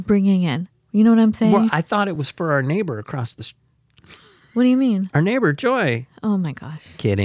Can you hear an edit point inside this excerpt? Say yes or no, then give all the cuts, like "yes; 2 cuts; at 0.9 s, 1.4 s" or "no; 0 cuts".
no; 0 cuts